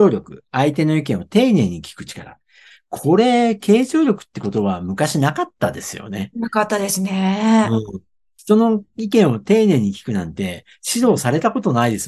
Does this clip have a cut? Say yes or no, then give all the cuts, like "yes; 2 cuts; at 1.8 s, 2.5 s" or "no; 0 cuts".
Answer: no; 0 cuts